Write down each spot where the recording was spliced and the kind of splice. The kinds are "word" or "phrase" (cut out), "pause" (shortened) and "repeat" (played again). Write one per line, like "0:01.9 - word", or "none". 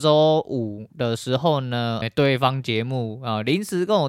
0:02.0 - word